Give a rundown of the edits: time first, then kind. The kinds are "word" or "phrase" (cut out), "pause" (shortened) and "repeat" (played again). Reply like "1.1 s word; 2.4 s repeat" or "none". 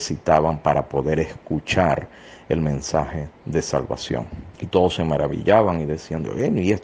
4.6 s pause

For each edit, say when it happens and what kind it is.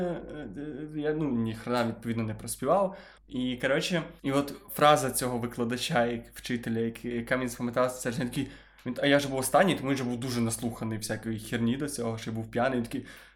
3.2 s pause; 4.2 s pause

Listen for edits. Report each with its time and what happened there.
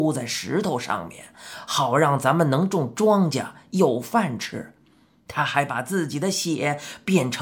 none

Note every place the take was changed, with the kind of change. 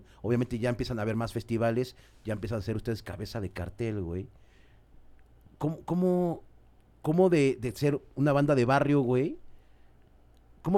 none

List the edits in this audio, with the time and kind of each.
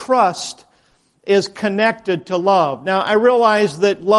none

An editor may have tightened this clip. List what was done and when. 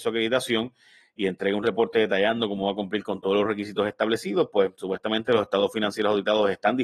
none

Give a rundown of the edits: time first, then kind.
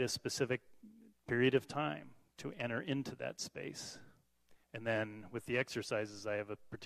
4.6 s pause

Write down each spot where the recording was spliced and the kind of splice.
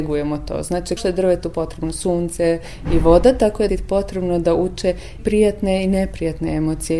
1.0 s word; 3.7 s word; 5.2 s word

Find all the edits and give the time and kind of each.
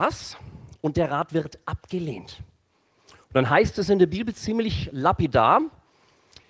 none

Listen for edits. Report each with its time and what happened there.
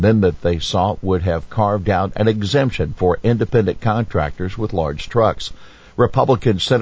none

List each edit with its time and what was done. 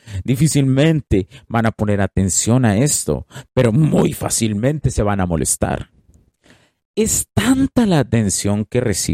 none

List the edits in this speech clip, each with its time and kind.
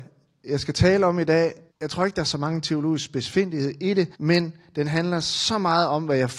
1.7 s pause; 4.1 s pause

